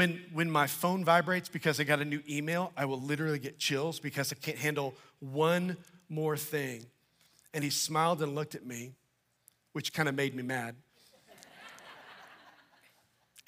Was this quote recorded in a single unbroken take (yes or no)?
yes